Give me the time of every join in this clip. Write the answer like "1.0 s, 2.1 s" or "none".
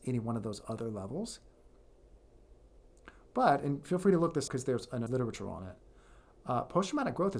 4.5 s, 5.1 s